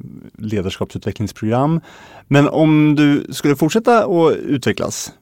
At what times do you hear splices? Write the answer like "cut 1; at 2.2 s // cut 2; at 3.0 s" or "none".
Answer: none